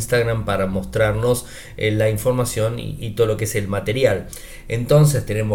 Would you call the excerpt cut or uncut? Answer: uncut